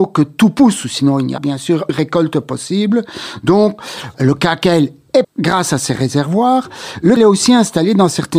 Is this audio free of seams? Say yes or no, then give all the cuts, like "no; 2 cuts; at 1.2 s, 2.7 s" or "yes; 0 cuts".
no; 5 cuts; at 1.4 s, 1.9 s, 4.1 s, 5.2 s, 7.2 s